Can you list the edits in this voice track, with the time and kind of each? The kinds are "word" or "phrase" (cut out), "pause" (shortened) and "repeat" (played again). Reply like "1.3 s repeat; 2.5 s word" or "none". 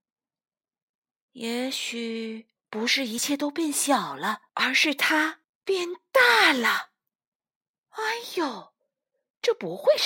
2.6 s pause; 4.5 s pause; 5.4 s pause